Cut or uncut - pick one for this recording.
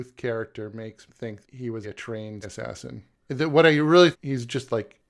cut